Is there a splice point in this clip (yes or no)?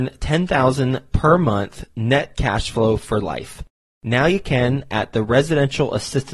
no